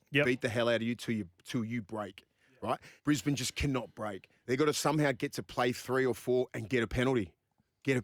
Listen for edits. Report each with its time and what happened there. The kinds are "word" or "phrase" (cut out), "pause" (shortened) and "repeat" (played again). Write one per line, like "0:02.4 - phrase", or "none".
0:03.0 - pause